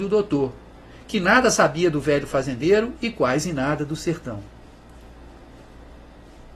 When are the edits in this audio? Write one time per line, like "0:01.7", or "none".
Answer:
none